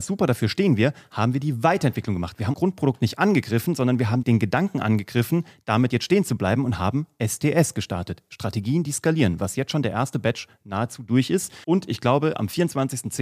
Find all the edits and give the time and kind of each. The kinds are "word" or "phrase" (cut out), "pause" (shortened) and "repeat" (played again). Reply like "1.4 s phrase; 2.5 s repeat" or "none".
2.5 s word; 4.2 s word; 11.6 s pause